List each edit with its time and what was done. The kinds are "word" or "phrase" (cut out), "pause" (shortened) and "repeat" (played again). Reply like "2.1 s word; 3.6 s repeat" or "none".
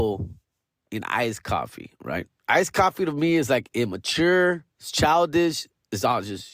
2.4 s pause; 4.7 s pause